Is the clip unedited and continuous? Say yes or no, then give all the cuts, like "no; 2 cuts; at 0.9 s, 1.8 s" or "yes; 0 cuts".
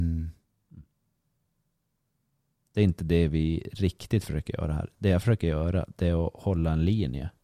yes; 0 cuts